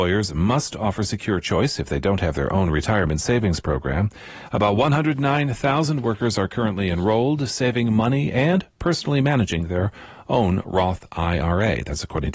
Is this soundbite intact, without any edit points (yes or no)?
yes